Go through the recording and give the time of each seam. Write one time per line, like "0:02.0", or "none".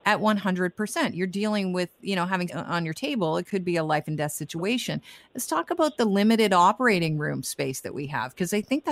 0:02.5